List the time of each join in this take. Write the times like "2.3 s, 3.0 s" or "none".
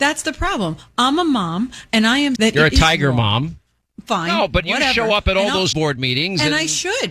2.4 s, 5.7 s